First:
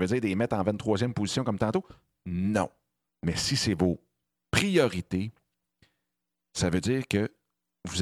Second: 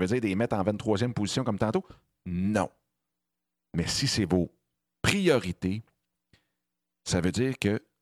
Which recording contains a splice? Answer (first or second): first